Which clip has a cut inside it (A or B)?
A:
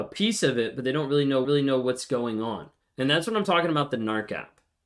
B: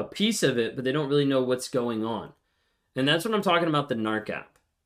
A